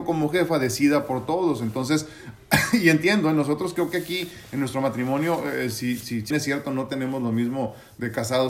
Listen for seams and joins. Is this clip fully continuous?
no; 1 cut; at 6.3 s

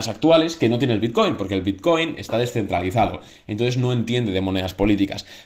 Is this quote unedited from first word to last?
yes; 0 cuts

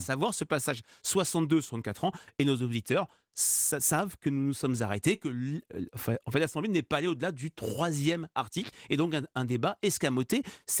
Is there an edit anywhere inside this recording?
no; 0 cuts

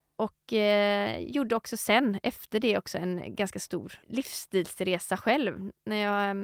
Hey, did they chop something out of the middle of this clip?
yes; 1 cut; at 4.0 s

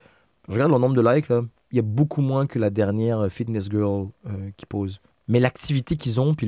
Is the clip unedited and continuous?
no; 1 cut; at 5.1 s

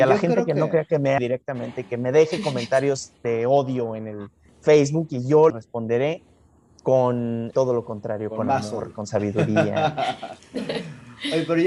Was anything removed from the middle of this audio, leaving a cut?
yes; 2 cuts; at 1.2 s, 5.5 s

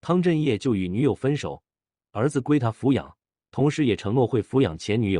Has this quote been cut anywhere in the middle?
no; 0 cuts

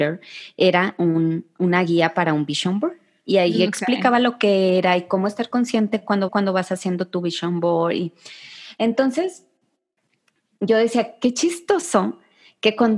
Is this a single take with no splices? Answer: no; 1 cut; at 6.3 s

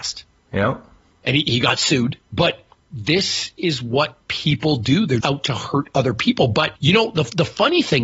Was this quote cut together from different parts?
yes; 2 cuts; at 2.2 s, 5.2 s

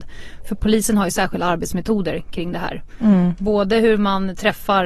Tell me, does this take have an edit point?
no; 0 cuts

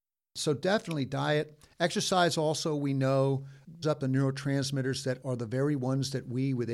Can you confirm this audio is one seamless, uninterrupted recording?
no; 1 cut; at 3.8 s

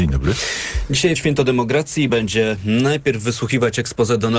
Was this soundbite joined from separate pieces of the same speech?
yes; 2 cuts; at 1.2 s, 2.1 s

